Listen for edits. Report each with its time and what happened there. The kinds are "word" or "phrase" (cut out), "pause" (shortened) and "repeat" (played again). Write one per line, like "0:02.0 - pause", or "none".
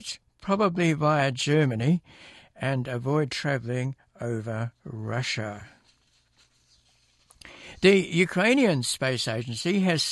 none